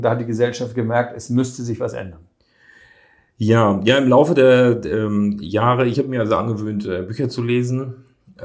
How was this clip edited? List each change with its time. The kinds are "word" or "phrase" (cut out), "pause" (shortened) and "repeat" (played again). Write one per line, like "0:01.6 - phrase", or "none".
none